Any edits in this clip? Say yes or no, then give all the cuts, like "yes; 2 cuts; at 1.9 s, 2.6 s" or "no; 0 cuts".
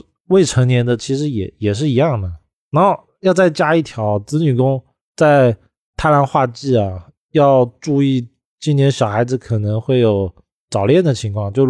no; 0 cuts